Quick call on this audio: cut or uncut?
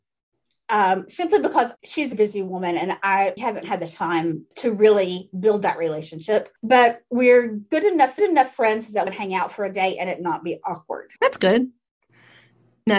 cut